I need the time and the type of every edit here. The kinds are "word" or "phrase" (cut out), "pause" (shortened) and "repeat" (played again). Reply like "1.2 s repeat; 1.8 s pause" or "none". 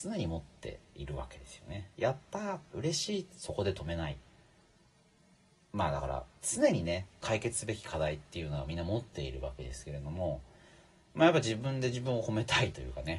1.9 s pause; 6.4 s pause